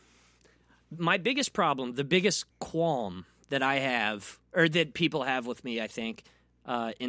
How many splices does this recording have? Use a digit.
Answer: 1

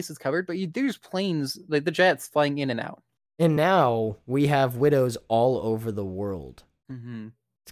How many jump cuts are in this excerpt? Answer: 0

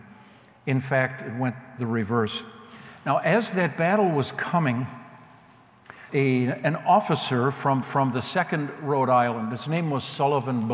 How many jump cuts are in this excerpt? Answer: 2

